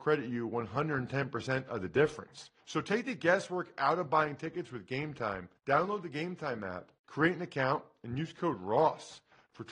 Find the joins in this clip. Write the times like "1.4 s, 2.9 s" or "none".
2.6 s, 5.6 s, 7.0 s